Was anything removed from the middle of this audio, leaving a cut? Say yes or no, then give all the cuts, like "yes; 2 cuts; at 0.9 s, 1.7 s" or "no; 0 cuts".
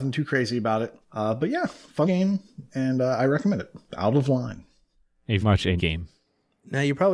yes; 6 cuts; at 1.0 s, 2.0 s, 2.7 s, 3.9 s, 5.4 s, 5.8 s